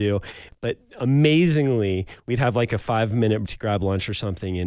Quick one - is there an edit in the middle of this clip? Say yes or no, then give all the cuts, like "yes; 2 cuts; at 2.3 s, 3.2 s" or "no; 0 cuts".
yes; 1 cut; at 3.5 s